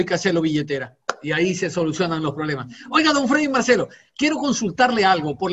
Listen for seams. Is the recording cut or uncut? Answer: uncut